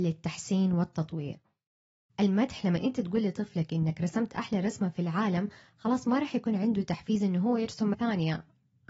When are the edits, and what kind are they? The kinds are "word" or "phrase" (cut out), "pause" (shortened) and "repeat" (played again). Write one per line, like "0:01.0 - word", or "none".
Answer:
0:07.9 - word